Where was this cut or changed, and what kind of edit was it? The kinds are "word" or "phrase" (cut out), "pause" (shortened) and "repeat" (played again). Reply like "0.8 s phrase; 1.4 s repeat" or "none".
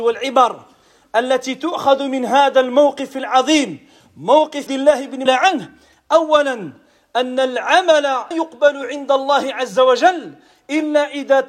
4.7 s word; 5.3 s phrase; 8.3 s word